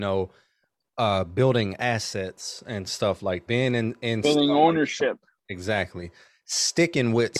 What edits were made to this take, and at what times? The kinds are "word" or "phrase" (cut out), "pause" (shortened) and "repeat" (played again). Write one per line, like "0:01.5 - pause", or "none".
0:03.5 - word